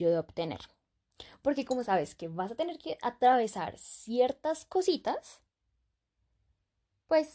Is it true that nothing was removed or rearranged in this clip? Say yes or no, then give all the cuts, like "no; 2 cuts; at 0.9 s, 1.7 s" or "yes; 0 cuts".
yes; 0 cuts